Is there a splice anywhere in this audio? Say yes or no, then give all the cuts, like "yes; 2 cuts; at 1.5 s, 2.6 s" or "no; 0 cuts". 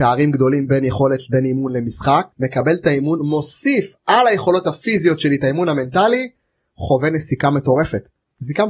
yes; 1 cut; at 2.3 s